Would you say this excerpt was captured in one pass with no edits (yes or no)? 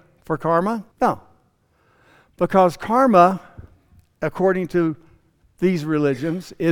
no